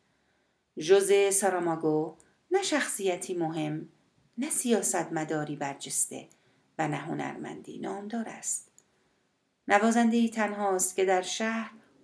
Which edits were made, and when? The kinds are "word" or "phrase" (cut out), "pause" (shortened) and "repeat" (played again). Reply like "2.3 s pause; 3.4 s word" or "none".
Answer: none